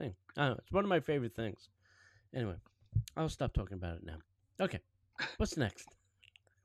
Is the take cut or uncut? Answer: uncut